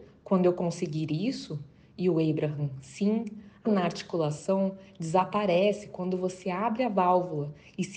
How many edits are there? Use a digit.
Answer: 1